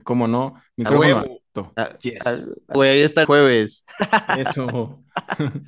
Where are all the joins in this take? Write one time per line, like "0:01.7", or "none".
0:02.7
0:03.2